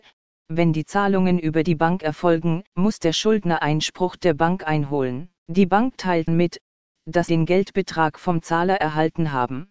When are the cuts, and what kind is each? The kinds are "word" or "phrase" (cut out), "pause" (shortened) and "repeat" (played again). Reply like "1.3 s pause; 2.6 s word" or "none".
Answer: 2.7 s pause; 3.6 s word; 5.4 s pause; 6.3 s phrase; 7.3 s word